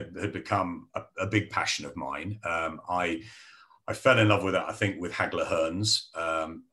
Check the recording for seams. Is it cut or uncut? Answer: uncut